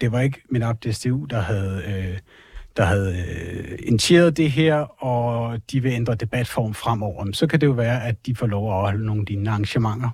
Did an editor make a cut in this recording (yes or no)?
no